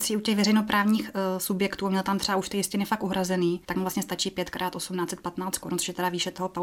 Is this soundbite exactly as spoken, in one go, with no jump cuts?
no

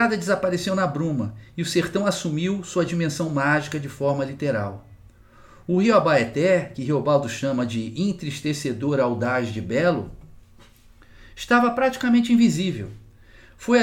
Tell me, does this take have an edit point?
no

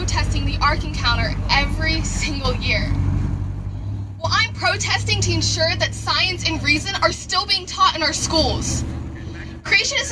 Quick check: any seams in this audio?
no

